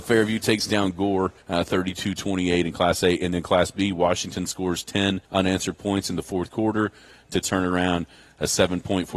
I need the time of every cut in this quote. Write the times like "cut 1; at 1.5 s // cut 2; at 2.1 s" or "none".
cut 1; at 1.4 s // cut 2; at 5.2 s